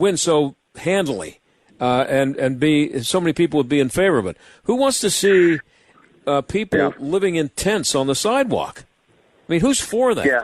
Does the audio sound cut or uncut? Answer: uncut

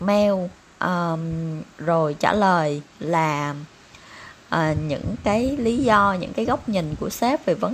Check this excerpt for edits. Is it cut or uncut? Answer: uncut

